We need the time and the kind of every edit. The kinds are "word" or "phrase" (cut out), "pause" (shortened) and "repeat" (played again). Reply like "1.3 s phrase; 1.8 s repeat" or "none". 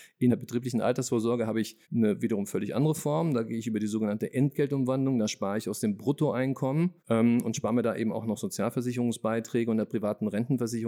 1.8 s pause; 7.0 s pause